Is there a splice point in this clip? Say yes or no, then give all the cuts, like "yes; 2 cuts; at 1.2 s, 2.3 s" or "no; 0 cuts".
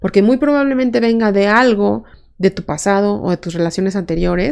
no; 0 cuts